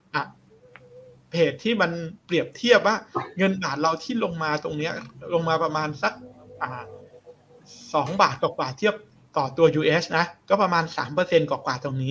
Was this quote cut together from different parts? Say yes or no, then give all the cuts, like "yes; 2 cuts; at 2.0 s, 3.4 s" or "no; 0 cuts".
no; 0 cuts